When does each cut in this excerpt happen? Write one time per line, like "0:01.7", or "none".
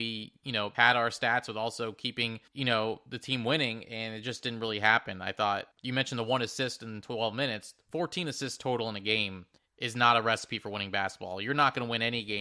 0:02.5
0:05.7
0:09.6